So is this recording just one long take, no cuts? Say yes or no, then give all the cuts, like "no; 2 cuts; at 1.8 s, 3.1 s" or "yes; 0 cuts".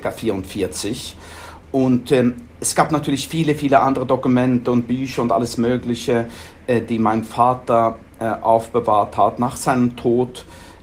yes; 0 cuts